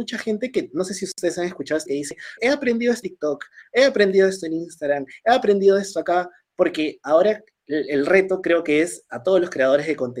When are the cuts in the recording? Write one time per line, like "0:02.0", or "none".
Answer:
0:01.9
0:02.4
0:03.0

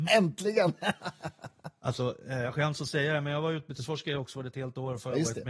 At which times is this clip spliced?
none

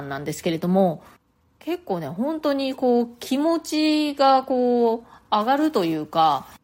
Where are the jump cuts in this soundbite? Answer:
none

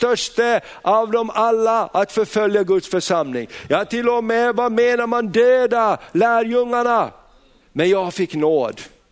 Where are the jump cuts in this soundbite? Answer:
none

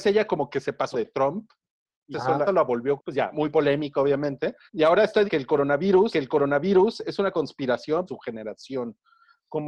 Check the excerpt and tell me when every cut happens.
0:00.9
0:02.1
0:02.5
0:03.0
0:03.3
0:04.7
0:05.3
0:06.1
0:08.1

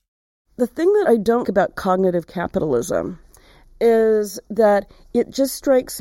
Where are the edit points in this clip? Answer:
0:01.0
0:01.4

